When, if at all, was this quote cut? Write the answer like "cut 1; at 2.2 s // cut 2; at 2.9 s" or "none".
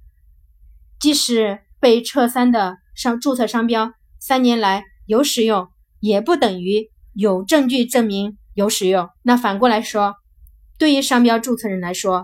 cut 1; at 9.2 s